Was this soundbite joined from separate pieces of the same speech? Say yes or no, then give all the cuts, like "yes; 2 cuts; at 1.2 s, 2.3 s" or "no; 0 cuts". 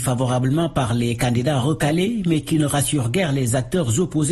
no; 0 cuts